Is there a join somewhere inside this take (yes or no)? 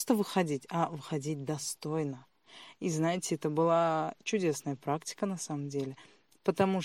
no